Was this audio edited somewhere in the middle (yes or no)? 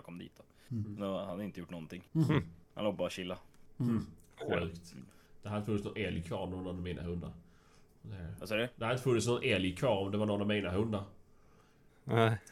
yes